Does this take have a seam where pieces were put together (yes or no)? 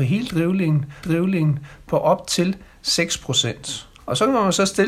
yes